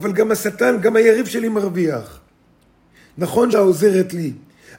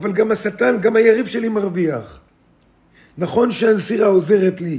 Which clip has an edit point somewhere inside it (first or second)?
first